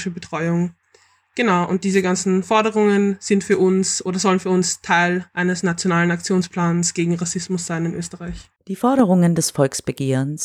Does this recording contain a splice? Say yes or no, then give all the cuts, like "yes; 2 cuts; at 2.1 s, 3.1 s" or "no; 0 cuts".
yes; 1 cut; at 8.6 s